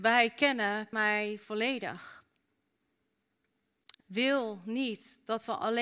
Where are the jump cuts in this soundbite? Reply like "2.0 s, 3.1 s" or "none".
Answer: 0.9 s, 4.0 s